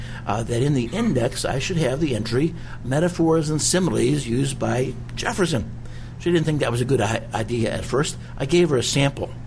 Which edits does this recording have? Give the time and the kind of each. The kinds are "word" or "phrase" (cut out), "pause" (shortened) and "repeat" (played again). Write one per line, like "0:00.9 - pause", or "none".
none